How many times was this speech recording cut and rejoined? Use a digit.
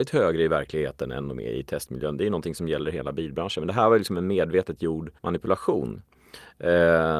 1